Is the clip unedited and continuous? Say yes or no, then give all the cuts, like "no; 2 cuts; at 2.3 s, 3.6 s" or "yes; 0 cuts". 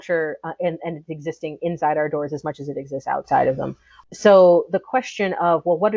yes; 0 cuts